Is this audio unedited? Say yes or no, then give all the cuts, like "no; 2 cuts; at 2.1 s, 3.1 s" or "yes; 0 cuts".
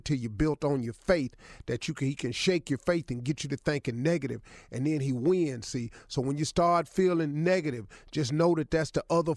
yes; 0 cuts